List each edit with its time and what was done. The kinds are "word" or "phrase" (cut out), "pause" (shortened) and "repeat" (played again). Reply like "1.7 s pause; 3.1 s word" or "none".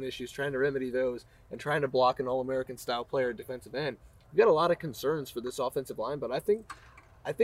none